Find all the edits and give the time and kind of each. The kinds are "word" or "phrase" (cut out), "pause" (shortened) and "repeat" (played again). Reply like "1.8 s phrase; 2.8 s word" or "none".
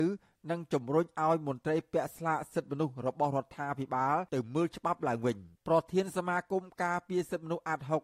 4.3 s pause; 5.6 s pause